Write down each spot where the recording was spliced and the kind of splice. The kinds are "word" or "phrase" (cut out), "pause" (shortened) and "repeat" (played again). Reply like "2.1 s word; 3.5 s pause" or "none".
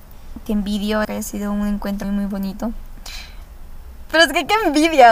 1.0 s word; 2.0 s word